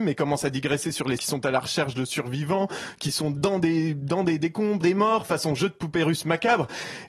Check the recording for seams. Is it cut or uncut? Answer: cut